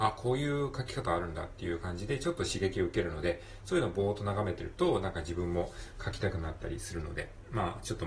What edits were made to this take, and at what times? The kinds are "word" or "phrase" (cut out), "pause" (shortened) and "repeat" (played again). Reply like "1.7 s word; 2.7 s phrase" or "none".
none

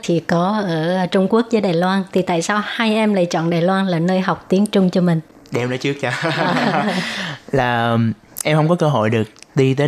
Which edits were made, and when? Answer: none

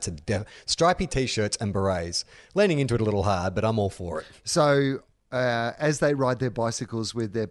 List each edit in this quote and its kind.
none

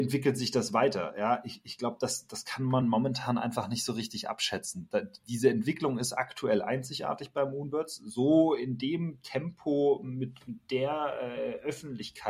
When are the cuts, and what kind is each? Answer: none

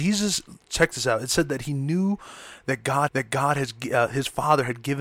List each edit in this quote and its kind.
3.1 s repeat

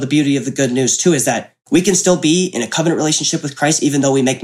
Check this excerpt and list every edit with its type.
1.6 s pause

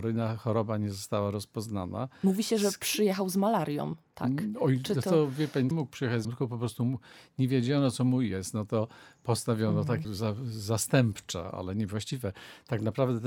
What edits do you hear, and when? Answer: 5.7 s phrase; 6.2 s word; 10.0 s word

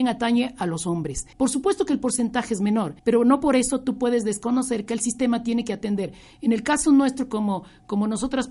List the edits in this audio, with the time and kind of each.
1.3 s pause; 3.0 s pause

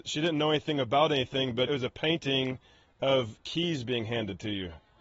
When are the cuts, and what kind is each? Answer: 1.7 s word

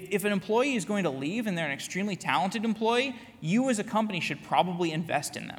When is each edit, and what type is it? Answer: none

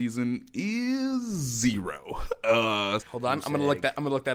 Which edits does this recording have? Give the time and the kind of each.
3.0 s word

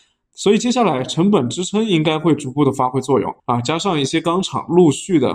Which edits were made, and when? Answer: 3.4 s pause

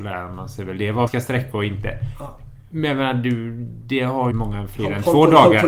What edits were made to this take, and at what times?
1.1 s word; 4.3 s phrase

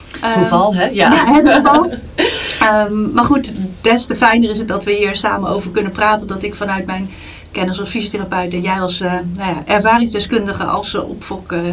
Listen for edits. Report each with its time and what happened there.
none

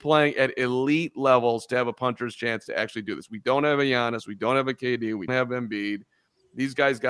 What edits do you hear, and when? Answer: 5.3 s word

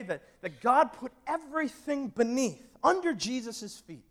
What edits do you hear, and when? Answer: none

